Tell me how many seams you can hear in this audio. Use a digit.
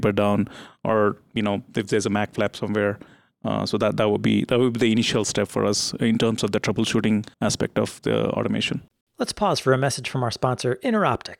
2